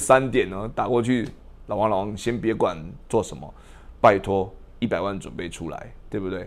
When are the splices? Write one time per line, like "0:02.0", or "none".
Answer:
0:04.7